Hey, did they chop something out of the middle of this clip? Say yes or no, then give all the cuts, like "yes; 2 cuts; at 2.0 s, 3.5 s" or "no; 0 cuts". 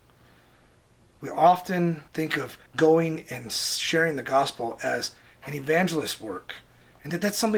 yes; 2 cuts; at 2.1 s, 2.7 s